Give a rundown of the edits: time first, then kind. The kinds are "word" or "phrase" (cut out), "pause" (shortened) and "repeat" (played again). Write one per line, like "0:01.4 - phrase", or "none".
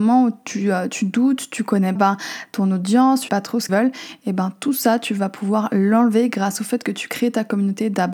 0:02.0 - word
0:03.3 - word
0:03.7 - word